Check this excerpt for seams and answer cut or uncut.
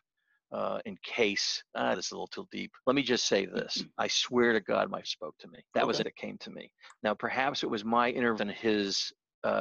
cut